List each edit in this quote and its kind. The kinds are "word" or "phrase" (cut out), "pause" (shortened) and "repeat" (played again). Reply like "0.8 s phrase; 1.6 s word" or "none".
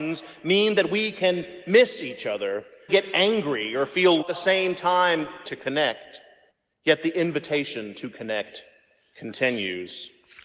2.9 s phrase; 4.2 s phrase; 5.4 s word; 6.5 s pause